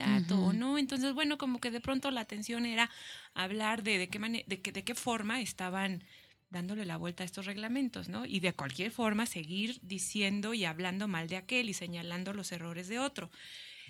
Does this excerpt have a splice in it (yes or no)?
no